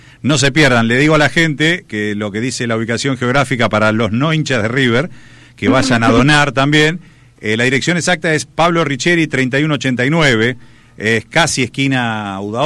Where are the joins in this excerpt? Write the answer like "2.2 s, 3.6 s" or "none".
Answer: none